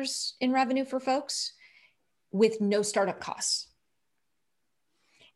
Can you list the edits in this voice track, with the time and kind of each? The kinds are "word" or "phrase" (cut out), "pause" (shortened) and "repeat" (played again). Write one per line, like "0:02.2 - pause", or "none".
none